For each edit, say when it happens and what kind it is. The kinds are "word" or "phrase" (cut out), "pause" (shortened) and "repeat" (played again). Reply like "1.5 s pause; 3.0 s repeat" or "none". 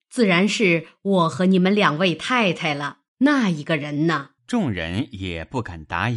3.1 s pause; 4.4 s pause